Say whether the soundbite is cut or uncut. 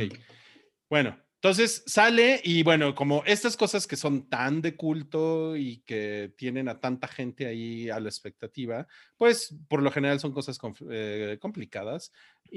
uncut